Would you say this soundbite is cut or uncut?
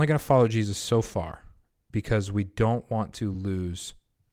uncut